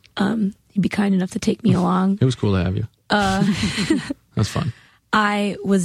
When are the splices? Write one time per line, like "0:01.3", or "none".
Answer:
none

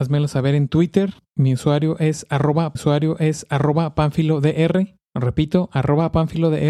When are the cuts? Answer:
0:02.8

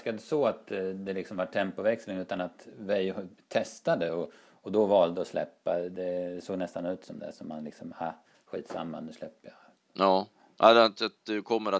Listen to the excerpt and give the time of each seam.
none

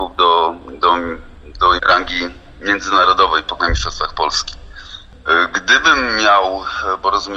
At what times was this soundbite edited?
0:01.8
0:03.6

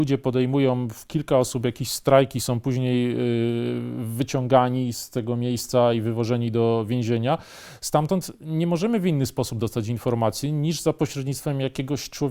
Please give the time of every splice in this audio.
0:04.9

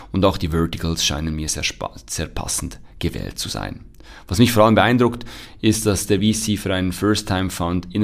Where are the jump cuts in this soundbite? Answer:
none

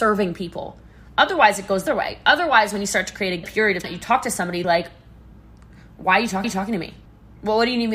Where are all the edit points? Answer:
0:01.9
0:03.4
0:03.8
0:04.6
0:06.4
0:07.1

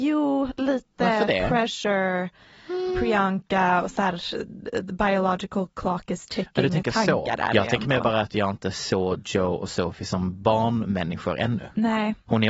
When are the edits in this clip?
none

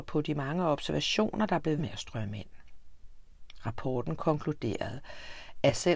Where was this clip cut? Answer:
0:01.8

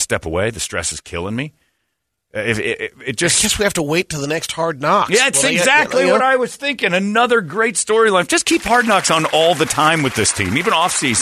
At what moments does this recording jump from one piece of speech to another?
none

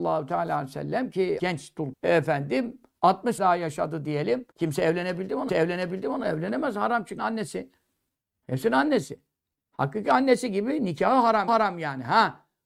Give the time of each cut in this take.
0:01.4
0:01.9
0:03.4
0:04.5
0:05.5
0:07.2
0:11.5

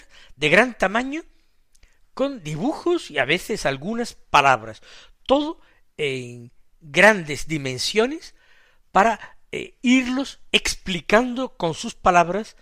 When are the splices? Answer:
none

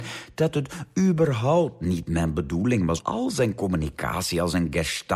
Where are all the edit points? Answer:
0:03.0

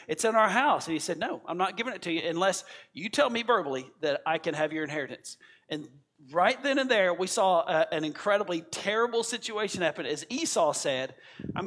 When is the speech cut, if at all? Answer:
none

